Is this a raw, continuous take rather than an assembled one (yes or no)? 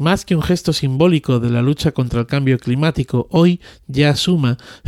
yes